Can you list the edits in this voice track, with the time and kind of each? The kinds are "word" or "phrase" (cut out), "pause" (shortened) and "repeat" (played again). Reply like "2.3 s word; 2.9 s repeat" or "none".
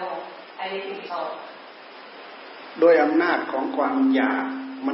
1.1 s word